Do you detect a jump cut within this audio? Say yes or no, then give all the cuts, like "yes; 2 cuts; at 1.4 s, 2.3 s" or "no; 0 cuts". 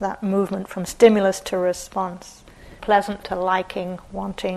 yes; 2 cuts; at 2.8 s, 3.2 s